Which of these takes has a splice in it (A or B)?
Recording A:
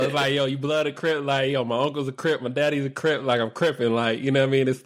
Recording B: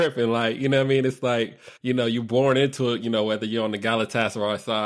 B